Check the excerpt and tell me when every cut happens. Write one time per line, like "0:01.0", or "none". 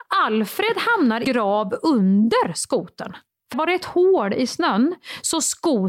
0:01.2
0:03.5